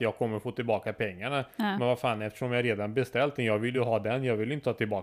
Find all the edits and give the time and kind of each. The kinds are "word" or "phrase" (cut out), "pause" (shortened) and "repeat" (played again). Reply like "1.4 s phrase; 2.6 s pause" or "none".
none